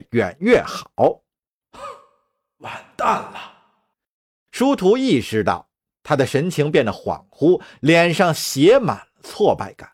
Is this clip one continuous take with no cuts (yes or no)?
yes